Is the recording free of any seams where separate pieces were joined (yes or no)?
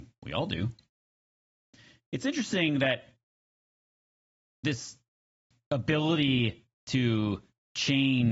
yes